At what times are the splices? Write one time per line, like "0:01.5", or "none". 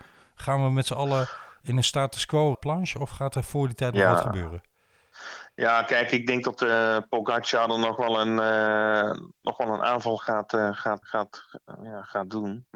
0:02.5
0:11.0